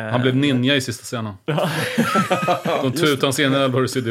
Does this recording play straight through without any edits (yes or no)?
yes